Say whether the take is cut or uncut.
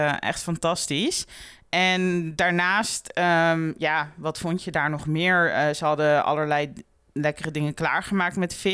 uncut